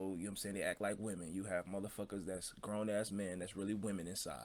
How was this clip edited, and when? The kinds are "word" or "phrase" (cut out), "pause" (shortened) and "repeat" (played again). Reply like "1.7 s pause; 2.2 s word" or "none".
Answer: none